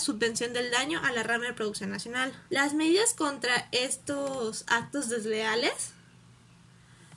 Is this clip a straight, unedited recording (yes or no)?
no